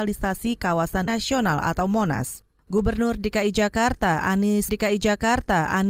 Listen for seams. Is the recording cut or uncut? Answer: cut